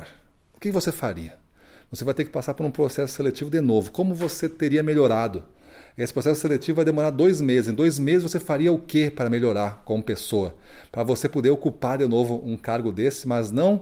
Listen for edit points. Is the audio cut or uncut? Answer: uncut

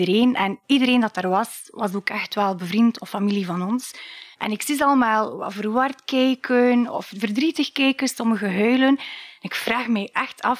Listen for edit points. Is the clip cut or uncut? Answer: cut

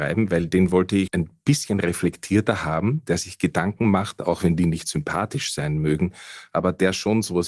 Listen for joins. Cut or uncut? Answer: cut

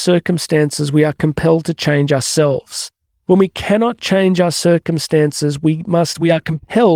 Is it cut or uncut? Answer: cut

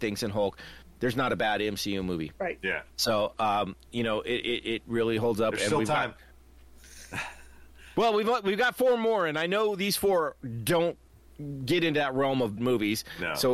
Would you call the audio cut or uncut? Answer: cut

